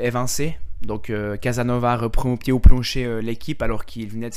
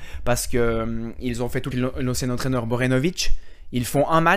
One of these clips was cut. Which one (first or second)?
second